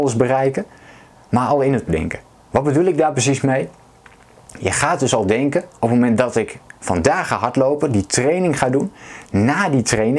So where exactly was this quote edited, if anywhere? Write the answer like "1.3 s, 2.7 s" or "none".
1.9 s, 2.3 s